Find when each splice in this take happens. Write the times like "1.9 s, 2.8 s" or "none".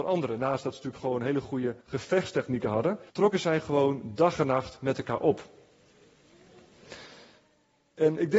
1.8 s, 3.1 s